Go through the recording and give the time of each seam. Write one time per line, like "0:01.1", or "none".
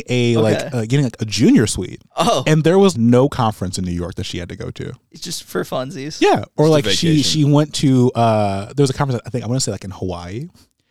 0:02.1
0:02.9